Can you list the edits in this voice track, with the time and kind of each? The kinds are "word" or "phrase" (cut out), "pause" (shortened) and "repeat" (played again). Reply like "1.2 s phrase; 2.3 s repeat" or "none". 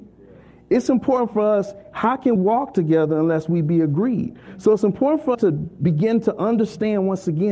2.4 s word; 5.3 s word